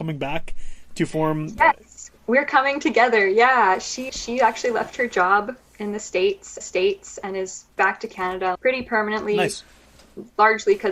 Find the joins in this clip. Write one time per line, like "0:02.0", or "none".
0:02.2
0:04.1
0:06.6
0:07.7
0:08.5